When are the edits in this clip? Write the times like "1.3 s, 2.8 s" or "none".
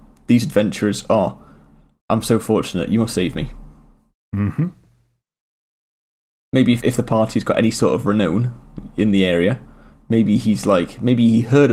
6.8 s